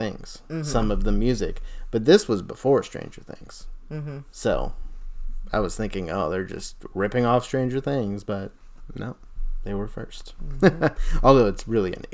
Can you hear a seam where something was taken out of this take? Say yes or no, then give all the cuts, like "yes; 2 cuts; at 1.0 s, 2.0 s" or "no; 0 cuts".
no; 0 cuts